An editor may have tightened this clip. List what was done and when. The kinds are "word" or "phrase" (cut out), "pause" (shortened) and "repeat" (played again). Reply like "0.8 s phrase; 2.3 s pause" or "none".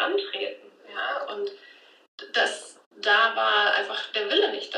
2.9 s pause

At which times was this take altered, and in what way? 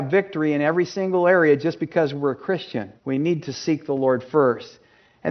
3.0 s pause

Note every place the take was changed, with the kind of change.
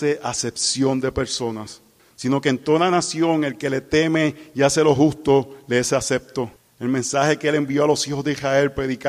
2.0 s pause; 6.6 s pause

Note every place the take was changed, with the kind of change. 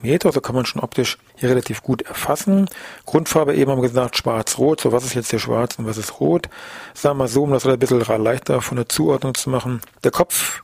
none

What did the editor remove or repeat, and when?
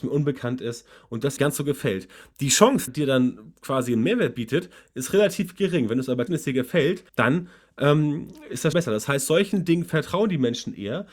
1.4 s phrase; 2.9 s phrase; 6.3 s word; 7.1 s pause; 8.7 s word

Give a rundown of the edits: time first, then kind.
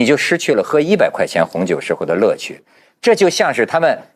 none

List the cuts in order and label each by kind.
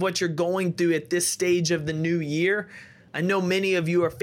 none

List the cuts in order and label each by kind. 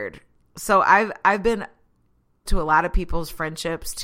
2.5 s word

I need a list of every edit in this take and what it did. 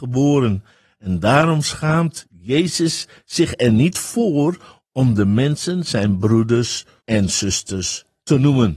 7.0 s pause

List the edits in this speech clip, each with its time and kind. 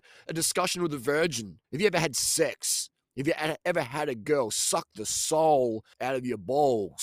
1.6 s pause; 5.9 s pause

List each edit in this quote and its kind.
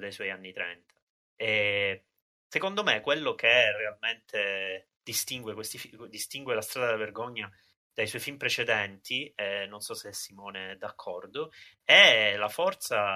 none

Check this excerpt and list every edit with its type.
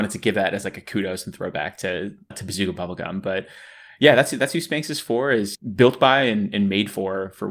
none

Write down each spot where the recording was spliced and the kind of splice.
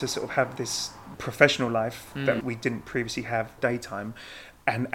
2.4 s word; 3.6 s phrase

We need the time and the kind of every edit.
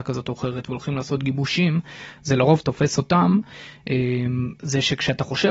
none

